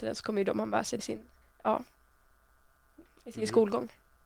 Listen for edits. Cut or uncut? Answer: cut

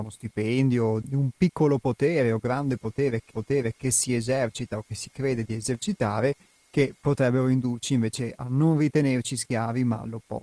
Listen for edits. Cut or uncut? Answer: cut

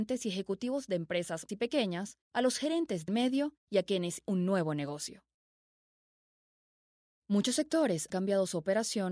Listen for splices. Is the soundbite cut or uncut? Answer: cut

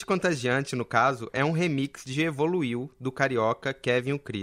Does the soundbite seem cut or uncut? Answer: uncut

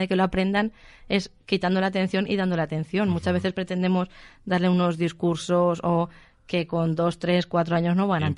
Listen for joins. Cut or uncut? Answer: uncut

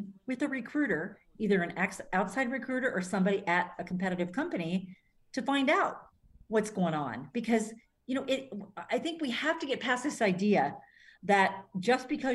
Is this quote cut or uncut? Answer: uncut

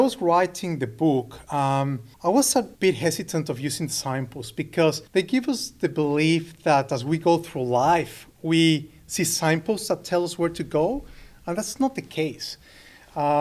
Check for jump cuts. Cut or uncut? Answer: cut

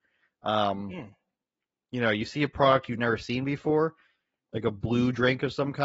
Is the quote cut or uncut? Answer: uncut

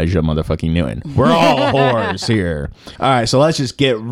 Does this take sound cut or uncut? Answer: cut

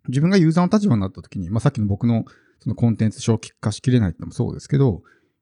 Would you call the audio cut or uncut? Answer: uncut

